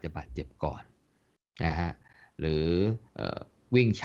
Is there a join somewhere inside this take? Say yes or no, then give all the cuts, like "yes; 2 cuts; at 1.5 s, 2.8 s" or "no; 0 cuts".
yes; 1 cut; at 3.1 s